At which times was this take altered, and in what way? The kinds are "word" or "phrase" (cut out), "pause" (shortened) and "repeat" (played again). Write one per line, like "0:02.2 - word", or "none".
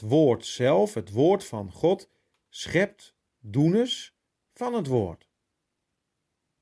none